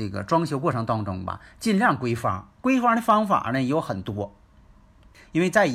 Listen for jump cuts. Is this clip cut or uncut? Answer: cut